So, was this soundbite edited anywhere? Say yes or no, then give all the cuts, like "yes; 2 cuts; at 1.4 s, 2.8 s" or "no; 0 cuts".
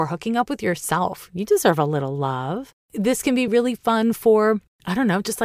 no; 0 cuts